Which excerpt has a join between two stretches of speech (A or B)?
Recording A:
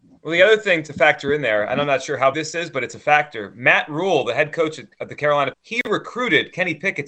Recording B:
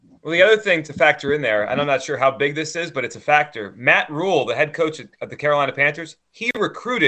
A